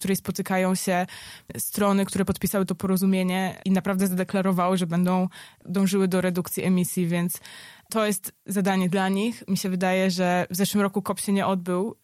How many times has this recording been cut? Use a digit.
0